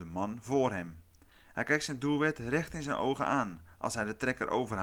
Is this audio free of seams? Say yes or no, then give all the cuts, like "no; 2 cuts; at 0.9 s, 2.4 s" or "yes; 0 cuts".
yes; 0 cuts